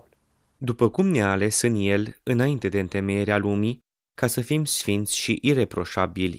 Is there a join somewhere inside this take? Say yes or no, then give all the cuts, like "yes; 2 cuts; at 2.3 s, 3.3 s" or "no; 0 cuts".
no; 0 cuts